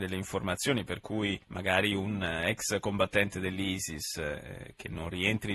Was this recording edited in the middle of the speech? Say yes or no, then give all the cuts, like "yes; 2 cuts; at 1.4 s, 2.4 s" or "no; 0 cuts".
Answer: yes; 1 cut; at 1.4 s